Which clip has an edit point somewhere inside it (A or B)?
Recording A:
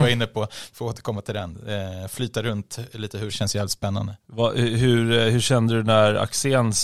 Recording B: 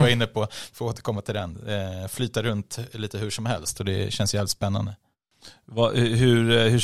A